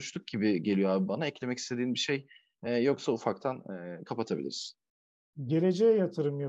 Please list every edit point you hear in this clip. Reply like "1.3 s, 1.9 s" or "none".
none